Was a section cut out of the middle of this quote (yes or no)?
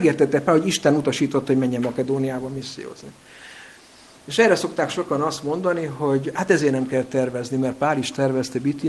no